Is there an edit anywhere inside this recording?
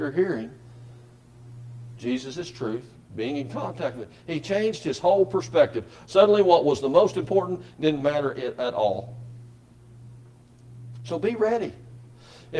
no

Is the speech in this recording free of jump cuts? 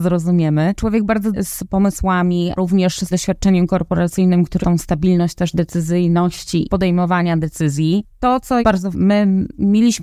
no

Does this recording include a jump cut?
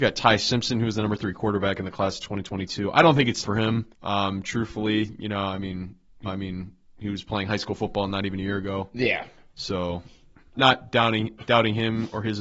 yes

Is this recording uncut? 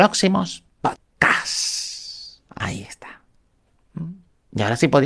no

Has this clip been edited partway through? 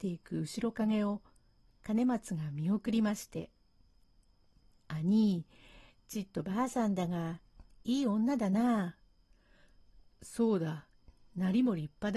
no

